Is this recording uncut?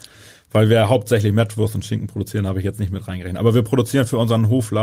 yes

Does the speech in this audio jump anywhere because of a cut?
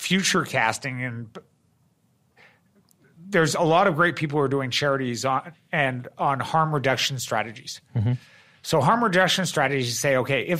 no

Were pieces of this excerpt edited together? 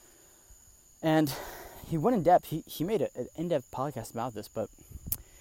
no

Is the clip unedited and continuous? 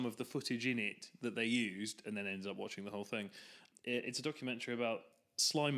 yes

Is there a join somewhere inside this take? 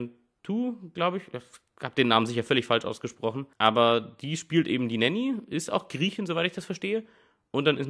yes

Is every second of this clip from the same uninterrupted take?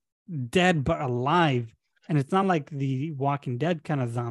yes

